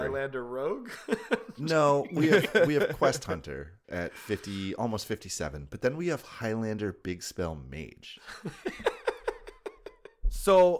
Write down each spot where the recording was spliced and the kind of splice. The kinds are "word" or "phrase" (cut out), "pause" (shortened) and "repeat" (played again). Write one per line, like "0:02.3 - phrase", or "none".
0:03.8 - pause